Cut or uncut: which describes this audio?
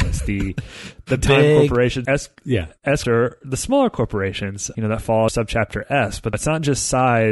cut